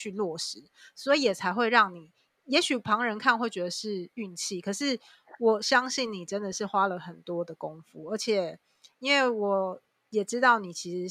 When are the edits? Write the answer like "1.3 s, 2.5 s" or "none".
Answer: none